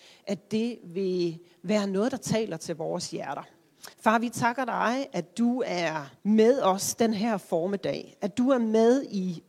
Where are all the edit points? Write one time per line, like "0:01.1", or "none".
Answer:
0:03.9
0:06.2